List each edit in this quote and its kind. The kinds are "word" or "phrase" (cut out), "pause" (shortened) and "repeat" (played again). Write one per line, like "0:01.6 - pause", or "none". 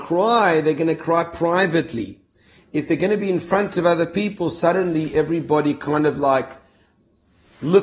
none